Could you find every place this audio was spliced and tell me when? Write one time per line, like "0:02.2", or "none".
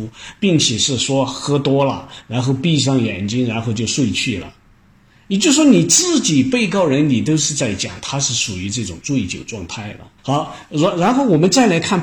0:10.2